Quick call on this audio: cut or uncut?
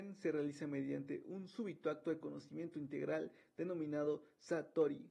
uncut